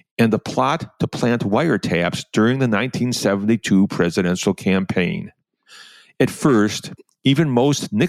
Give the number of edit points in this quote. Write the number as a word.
zero